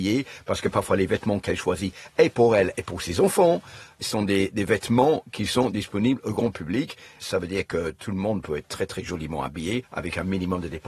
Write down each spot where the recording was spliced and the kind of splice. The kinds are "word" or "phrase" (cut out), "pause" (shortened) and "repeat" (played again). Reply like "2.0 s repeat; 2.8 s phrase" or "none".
none